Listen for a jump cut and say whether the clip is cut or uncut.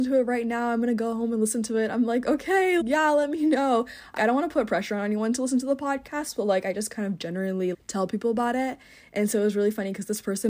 cut